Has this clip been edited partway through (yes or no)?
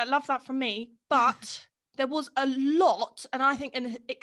yes